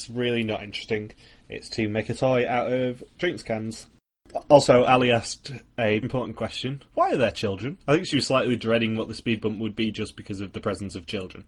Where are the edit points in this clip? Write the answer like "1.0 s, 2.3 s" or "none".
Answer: 6.0 s, 6.9 s